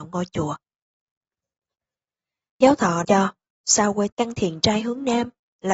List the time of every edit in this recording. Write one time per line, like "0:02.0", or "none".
0:03.0
0:04.1